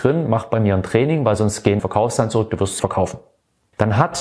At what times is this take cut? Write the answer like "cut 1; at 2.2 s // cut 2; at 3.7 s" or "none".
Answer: cut 1; at 1.8 s // cut 2; at 2.8 s